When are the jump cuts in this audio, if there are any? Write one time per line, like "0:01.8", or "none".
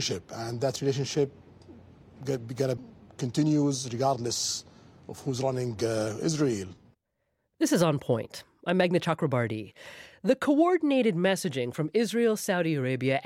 0:02.8